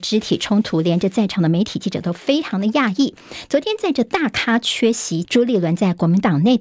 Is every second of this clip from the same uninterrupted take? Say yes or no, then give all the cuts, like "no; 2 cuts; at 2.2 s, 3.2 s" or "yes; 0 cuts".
no; 1 cut; at 5.2 s